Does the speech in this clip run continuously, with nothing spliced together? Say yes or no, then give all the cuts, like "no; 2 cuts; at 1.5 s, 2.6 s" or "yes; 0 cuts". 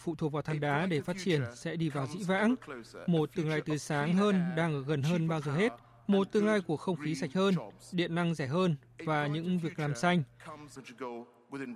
yes; 0 cuts